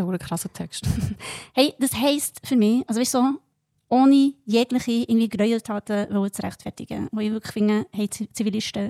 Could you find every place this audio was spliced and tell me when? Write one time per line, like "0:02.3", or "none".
none